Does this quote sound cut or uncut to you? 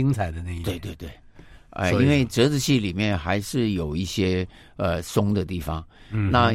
uncut